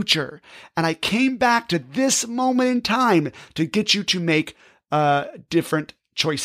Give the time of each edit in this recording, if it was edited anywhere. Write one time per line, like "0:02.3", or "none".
none